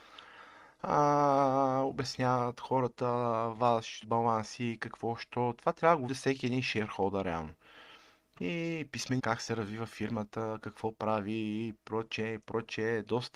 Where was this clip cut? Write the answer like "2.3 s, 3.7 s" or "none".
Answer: 4.0 s, 6.1 s, 9.2 s